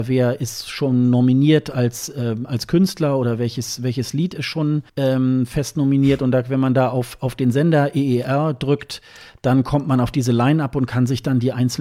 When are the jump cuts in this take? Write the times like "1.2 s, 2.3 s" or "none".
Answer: 4.9 s

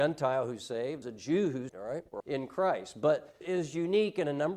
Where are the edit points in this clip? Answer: 1.0 s, 1.7 s, 2.2 s, 3.4 s

